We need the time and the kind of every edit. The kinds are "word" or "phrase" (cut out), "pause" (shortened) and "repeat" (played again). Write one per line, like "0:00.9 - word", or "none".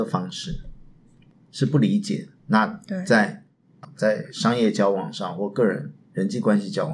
0:02.4 - pause